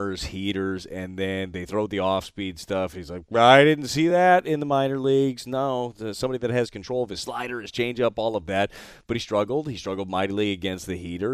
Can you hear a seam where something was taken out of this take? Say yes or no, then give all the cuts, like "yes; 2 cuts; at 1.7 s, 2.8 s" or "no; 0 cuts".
no; 0 cuts